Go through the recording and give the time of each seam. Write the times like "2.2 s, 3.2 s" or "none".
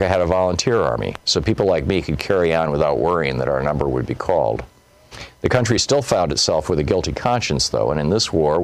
none